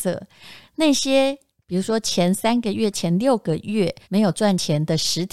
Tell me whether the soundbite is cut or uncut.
cut